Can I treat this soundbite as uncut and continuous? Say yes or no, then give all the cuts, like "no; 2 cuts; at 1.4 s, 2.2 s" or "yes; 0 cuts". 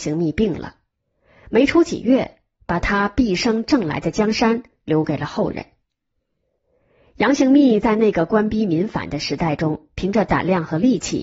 yes; 0 cuts